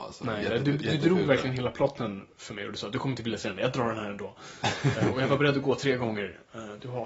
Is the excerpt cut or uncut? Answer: uncut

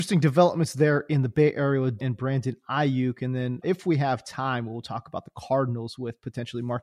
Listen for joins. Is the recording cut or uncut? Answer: cut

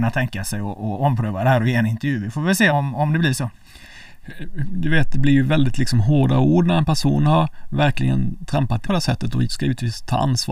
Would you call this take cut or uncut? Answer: cut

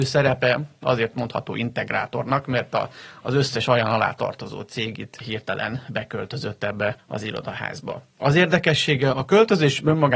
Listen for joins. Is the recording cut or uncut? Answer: cut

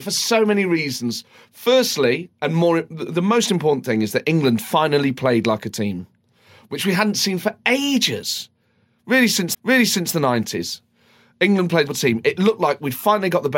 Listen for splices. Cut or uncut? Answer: cut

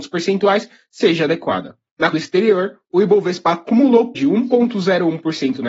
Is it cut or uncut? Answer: cut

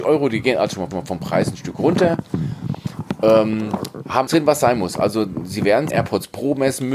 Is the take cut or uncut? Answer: cut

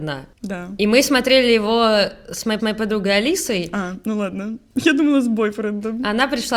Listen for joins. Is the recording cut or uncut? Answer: cut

